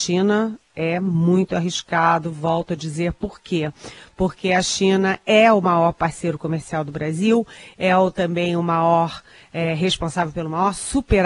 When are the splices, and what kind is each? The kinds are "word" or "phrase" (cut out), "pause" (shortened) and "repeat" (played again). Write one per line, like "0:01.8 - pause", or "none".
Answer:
none